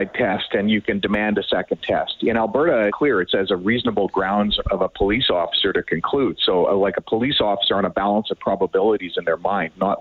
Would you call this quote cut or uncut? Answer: cut